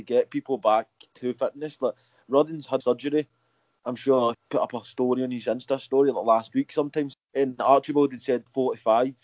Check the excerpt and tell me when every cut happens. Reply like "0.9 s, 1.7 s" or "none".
2.8 s, 4.3 s, 7.1 s